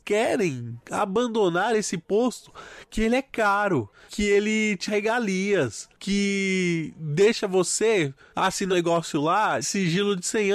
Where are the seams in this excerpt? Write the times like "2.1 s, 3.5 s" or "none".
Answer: 4.1 s, 4.9 s, 8.7 s, 9.6 s